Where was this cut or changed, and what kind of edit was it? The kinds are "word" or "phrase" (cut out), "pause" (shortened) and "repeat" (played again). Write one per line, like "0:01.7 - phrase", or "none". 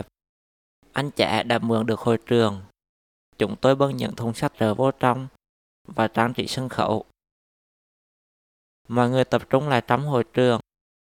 0:04.5 - word